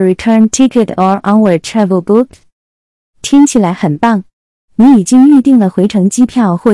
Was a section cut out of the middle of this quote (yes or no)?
no